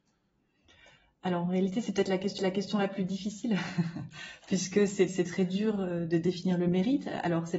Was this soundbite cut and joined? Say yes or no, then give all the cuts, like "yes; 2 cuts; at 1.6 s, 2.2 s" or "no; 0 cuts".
yes; 2 cuts; at 2.4 s, 5.1 s